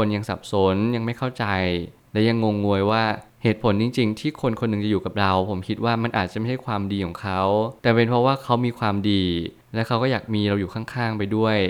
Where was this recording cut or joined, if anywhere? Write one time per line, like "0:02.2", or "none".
0:07.8